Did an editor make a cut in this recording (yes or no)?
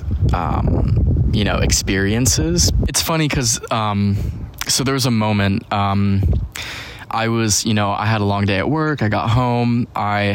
no